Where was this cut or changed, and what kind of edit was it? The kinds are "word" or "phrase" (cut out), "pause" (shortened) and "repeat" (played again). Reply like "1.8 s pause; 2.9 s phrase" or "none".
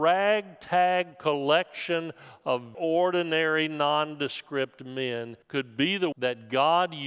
2.7 s word; 5.4 s pause; 6.1 s word